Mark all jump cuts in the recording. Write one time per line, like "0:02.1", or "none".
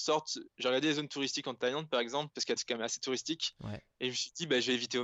0:02.6